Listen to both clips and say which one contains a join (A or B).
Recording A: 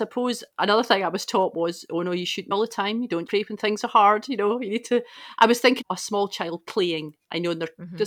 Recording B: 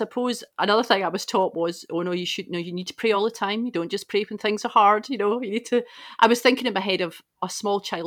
A